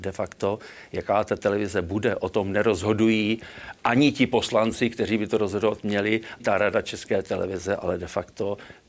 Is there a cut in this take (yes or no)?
yes